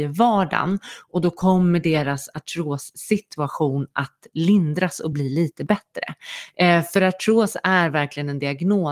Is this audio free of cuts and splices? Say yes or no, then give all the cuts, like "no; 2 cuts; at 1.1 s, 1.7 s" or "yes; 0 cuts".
yes; 0 cuts